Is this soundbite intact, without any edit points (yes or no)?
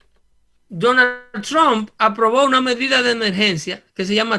yes